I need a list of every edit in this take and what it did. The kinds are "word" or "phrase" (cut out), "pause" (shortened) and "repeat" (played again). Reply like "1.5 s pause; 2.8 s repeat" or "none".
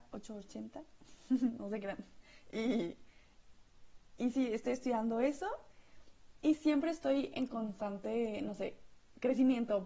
none